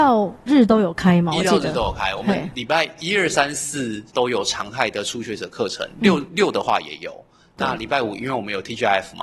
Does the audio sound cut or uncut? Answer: cut